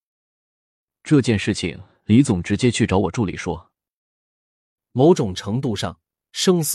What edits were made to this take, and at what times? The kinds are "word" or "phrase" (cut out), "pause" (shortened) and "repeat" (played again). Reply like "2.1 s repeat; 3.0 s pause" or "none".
none